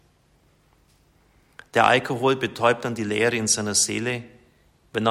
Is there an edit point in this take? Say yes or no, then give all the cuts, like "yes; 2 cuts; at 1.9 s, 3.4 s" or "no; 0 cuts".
no; 0 cuts